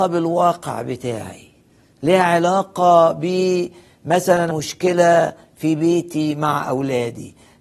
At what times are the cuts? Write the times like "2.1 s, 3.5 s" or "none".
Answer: 4.5 s